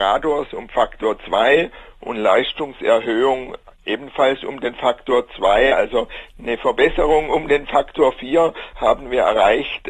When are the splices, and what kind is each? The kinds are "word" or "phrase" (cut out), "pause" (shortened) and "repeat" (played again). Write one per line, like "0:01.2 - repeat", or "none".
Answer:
0:08.7 - word